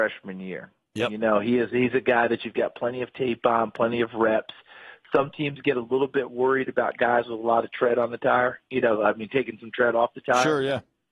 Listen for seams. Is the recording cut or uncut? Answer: uncut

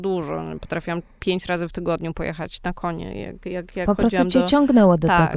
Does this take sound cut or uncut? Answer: uncut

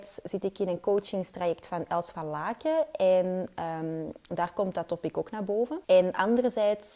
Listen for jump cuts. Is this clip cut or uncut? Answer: cut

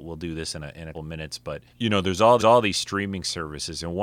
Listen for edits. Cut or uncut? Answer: cut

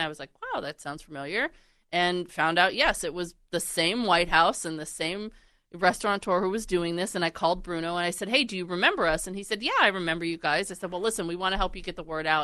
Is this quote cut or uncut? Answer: uncut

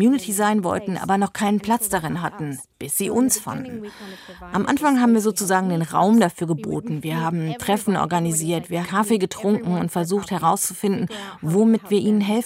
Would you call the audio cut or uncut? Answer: cut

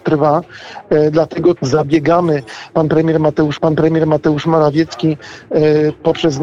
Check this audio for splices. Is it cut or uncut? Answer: cut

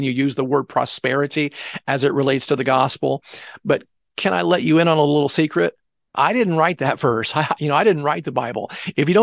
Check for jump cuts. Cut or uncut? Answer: uncut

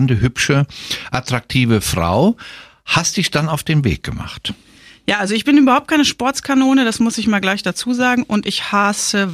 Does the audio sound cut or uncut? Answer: uncut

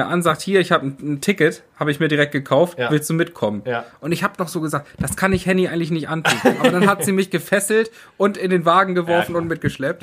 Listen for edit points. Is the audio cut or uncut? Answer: uncut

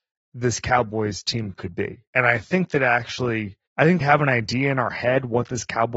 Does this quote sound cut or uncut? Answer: cut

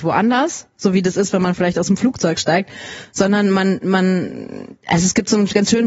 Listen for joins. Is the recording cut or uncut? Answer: uncut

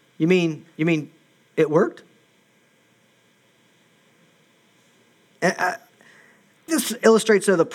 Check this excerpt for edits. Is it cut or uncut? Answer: cut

